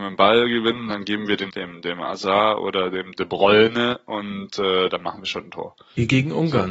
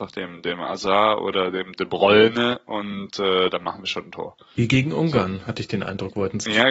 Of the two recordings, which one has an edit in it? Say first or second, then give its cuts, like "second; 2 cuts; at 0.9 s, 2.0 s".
first; 1 cut; at 1.5 s